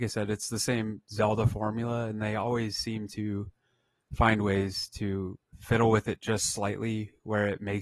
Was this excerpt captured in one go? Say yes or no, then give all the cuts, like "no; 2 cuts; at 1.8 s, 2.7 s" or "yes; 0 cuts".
yes; 0 cuts